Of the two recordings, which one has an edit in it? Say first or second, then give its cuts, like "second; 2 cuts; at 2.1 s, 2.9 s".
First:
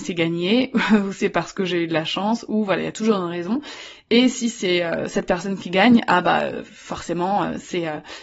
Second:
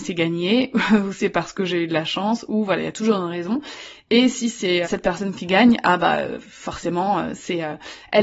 second; 1 cut; at 4.8 s